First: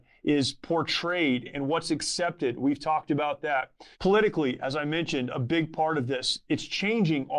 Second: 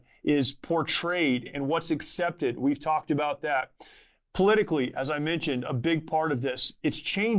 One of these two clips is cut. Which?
first; 1 cut; at 3.9 s

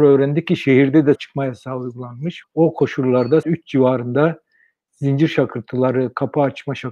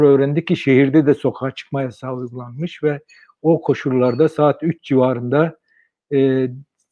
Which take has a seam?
first; 4 cuts; at 1.2 s, 2.4 s, 3.4 s, 4.9 s

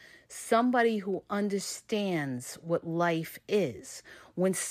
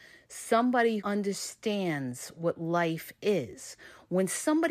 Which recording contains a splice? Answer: second; 1 cut; at 1.0 s

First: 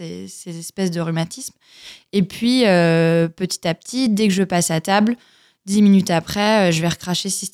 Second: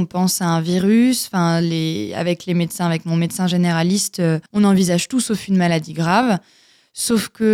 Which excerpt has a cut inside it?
second; 1 cut; at 4.5 s

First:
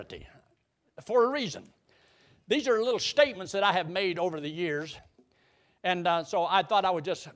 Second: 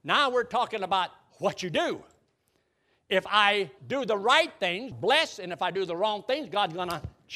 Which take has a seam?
second; 2 cuts; at 3.8 s, 4.9 s

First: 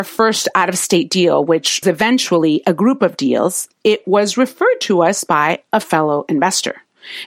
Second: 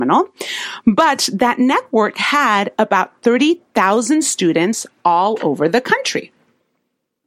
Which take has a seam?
first; 1 cut; at 1.8 s

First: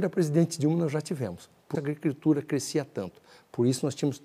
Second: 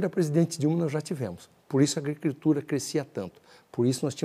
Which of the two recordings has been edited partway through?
first; 1 cut; at 1.7 s

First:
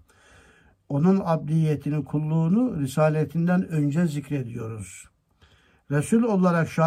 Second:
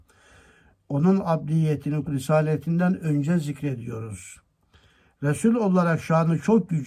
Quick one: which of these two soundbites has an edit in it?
second; 1 cut; at 2.1 s

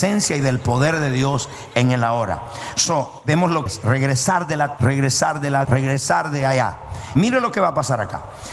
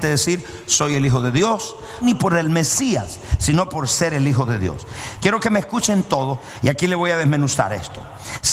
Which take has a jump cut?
first; 3 cuts; at 3.7 s, 4.8 s, 5.6 s

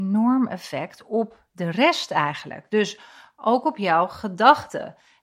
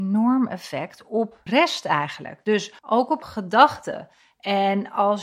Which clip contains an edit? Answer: second; 3 cuts; at 1.5 s, 2.8 s, 3.2 s

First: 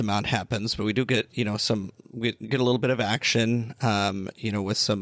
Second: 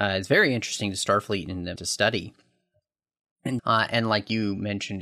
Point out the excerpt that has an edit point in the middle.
second; 2 cuts; at 1.8 s, 3.6 s

